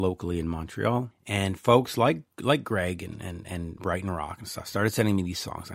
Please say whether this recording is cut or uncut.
uncut